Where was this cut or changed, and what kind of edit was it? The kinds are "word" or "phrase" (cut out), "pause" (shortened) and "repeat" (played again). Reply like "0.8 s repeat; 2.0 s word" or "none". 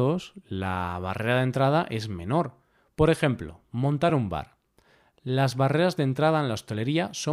none